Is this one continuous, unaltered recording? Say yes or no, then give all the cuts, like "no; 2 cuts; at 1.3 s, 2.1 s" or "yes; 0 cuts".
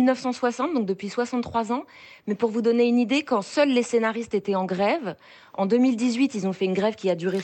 yes; 0 cuts